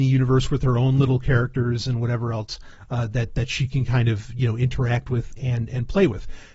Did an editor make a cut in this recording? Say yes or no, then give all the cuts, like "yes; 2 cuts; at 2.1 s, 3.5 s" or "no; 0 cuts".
no; 0 cuts